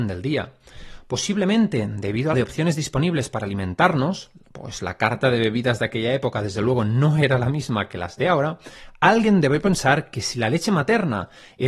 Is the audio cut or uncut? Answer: cut